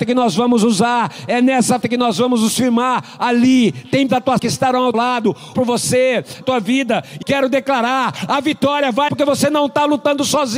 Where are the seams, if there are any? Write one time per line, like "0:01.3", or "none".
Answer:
0:01.8
0:04.1
0:04.4
0:04.9
0:05.5
0:06.4
0:07.2
0:09.1